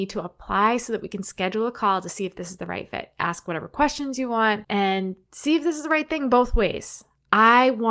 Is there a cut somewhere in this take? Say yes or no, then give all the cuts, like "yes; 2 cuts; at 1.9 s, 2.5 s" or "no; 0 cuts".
no; 0 cuts